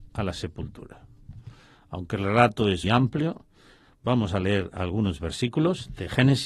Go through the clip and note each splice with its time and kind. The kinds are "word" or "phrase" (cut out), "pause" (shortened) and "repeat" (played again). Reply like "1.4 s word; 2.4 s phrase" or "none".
2.8 s word